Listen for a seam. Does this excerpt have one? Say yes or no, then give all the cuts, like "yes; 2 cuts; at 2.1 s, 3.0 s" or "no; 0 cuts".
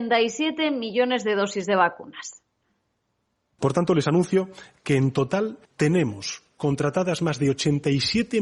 yes; 1 cut; at 5.6 s